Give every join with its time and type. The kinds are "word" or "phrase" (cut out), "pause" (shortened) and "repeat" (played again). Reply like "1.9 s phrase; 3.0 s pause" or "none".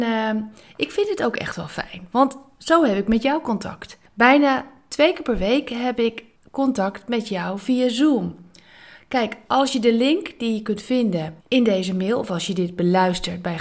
4.1 s pause; 6.4 s pause; 11.4 s pause

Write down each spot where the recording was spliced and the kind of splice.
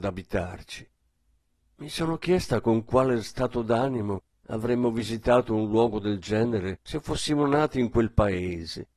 none

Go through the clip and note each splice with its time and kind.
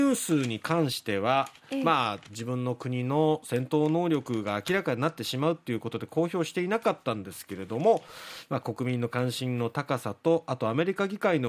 none

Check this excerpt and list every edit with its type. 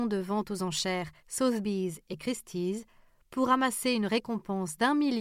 1.2 s pause

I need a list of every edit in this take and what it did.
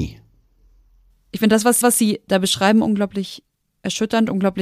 1.8 s repeat

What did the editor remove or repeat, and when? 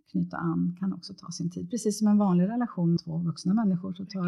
3.0 s word

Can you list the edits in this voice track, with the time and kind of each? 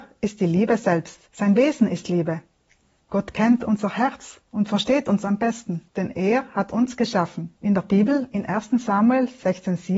1.2 s pause; 5.9 s pause; 7.6 s pause

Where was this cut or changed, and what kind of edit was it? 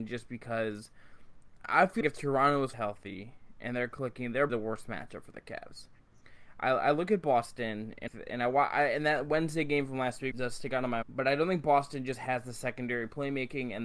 2.0 s word; 2.7 s word; 4.5 s word; 8.1 s word; 10.3 s word; 11.0 s word

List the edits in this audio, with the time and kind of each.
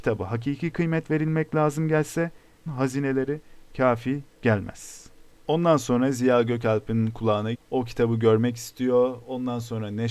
2.7 s word; 7.5 s word

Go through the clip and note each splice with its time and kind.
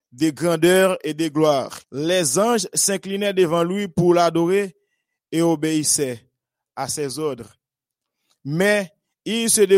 1.8 s pause

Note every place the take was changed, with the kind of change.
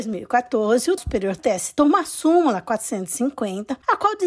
1.0 s word; 1.4 s word; 1.8 s word

